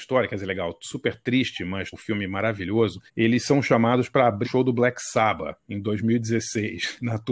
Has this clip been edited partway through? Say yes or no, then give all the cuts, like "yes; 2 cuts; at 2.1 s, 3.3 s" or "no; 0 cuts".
yes; 3 cuts; at 1.9 s, 3.1 s, 4.4 s